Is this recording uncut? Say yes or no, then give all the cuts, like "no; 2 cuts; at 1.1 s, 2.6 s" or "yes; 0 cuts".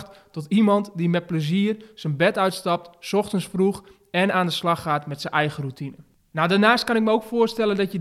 yes; 0 cuts